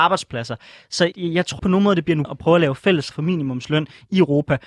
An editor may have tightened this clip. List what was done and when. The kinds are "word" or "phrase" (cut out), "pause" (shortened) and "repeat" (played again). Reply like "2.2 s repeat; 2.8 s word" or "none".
1.1 s word; 1.6 s word; 2.2 s word; 3.1 s word